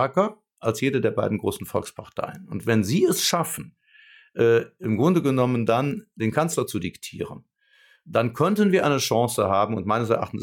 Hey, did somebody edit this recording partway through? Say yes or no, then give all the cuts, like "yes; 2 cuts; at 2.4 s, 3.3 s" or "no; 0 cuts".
no; 0 cuts